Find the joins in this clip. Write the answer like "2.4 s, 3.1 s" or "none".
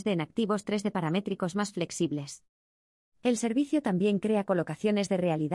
none